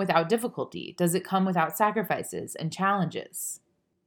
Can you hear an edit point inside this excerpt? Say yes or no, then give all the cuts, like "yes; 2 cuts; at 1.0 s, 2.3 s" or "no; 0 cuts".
no; 0 cuts